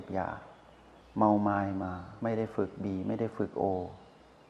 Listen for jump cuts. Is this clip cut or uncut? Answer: cut